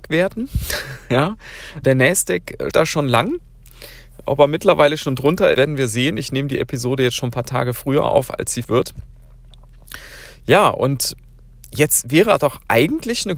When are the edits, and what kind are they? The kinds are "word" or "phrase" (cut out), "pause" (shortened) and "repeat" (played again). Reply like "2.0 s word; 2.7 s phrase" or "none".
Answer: 1.8 s word; 2.7 s word; 5.5 s word; 8.6 s word